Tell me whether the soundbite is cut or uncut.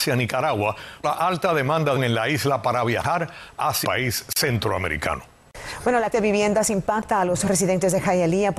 cut